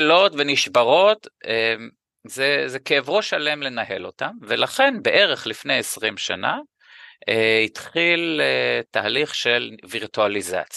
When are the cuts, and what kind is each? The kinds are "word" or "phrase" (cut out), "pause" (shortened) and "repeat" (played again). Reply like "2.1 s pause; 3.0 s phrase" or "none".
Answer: none